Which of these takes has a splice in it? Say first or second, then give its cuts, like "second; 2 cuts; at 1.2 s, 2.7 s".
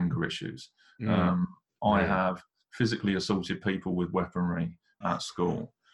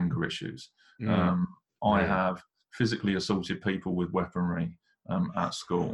first; 1 cut; at 5.0 s